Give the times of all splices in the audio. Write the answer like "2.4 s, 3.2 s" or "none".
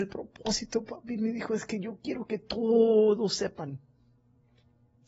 none